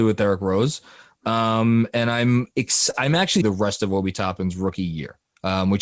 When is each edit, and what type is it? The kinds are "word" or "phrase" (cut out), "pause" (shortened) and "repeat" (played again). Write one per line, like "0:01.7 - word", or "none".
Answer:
0:03.4 - phrase